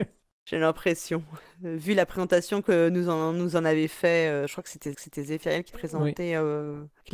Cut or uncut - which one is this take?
cut